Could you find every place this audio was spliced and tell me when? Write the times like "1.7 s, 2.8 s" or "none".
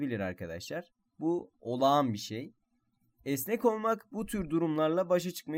none